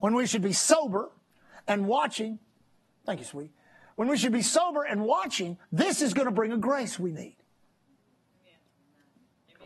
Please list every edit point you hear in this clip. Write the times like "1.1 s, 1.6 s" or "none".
none